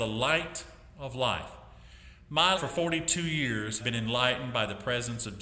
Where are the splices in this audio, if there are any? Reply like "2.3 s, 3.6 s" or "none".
2.6 s, 3.8 s